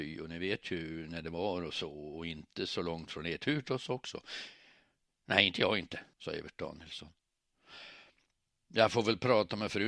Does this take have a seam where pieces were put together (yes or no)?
yes